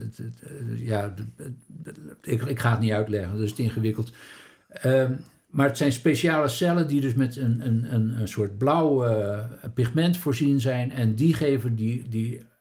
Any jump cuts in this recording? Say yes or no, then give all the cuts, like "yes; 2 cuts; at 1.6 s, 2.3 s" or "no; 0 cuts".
no; 0 cuts